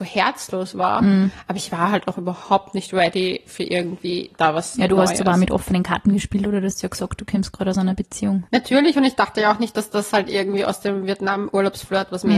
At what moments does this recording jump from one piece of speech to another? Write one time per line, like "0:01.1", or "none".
0:08.5